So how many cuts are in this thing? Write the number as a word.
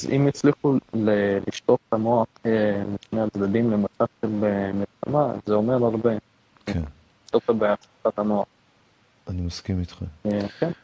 one